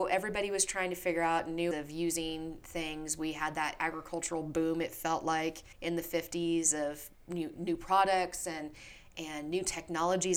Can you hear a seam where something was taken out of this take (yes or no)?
yes